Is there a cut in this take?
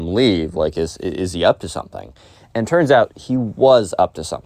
no; 0 cuts

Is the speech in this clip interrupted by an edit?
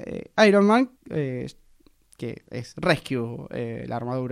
yes; 1 cut; at 1.0 s

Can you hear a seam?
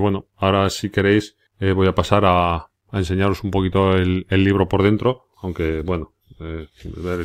yes; 3 cuts; at 1.5 s, 2.8 s, 5.3 s

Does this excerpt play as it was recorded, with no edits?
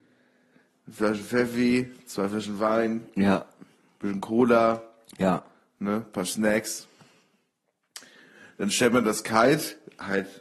yes; 0 cuts

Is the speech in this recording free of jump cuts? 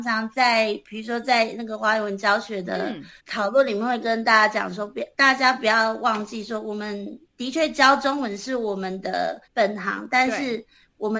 no; 4 cuts; at 3.2 s, 5.1 s, 7.3 s, 9.4 s

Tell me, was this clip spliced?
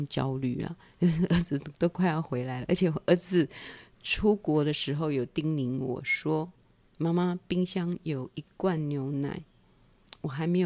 no; 0 cuts

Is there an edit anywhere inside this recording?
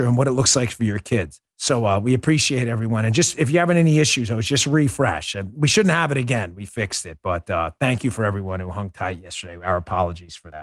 yes; 1 cut; at 1.5 s

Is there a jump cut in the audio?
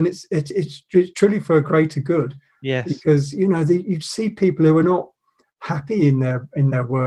no; 0 cuts

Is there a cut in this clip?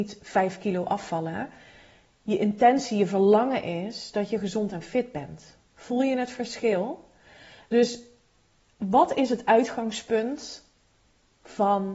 no; 0 cuts

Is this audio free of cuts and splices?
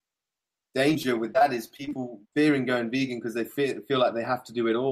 no; 1 cut; at 2.2 s

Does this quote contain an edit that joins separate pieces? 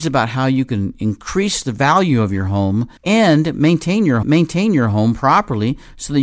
yes; 2 cuts; at 3.0 s, 4.2 s

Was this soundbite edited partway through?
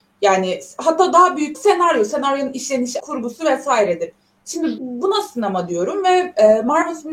yes; 3 cuts; at 1.5 s, 3.0 s, 4.8 s

